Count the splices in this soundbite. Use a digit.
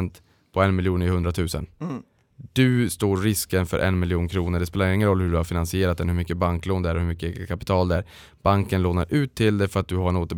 1